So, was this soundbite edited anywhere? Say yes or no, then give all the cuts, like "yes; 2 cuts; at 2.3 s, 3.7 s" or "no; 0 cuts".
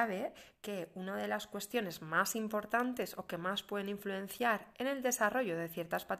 no; 0 cuts